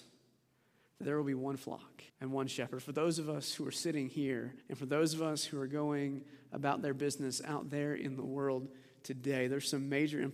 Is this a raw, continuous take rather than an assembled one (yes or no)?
no